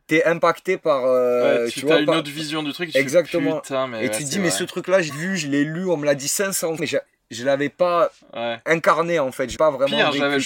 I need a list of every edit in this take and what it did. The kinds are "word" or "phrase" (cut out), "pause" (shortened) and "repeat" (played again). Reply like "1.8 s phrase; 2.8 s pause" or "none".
5.1 s word; 6.8 s word; 9.6 s word

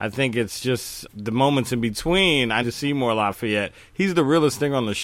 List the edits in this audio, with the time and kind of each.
1.1 s word; 2.6 s word

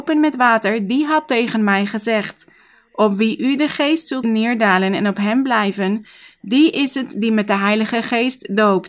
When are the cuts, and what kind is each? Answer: 4.2 s word

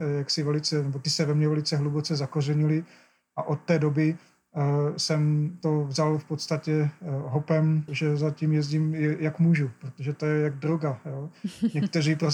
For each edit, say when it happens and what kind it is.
7.9 s word

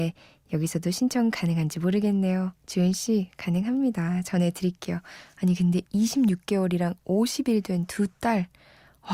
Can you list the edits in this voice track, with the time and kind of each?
2.6 s pause

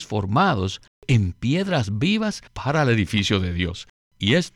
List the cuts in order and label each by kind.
2.5 s pause

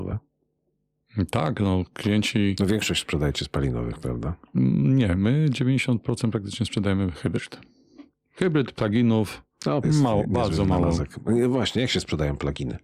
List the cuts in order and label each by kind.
9.8 s phrase

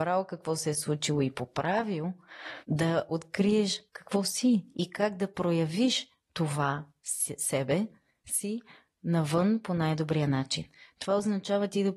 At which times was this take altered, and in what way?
2.6 s pause; 3.9 s pause

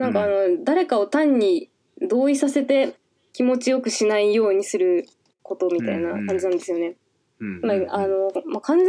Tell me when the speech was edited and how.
none

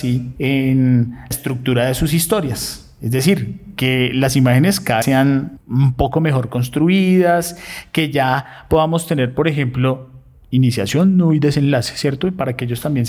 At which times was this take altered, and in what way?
1.3 s word; 5.0 s word

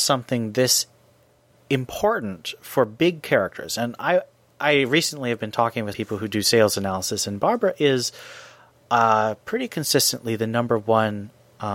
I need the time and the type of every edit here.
5.9 s word

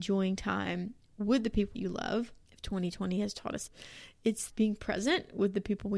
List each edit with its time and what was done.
1.7 s word; 2.4 s pause; 3.7 s word; 4.5 s word

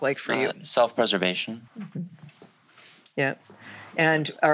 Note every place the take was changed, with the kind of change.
1.7 s pause

